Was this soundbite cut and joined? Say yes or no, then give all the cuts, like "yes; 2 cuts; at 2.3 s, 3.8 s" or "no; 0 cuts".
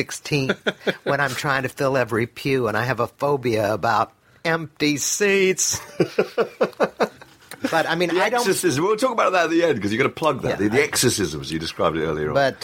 no; 0 cuts